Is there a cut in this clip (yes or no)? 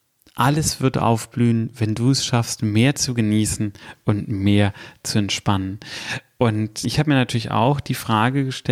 yes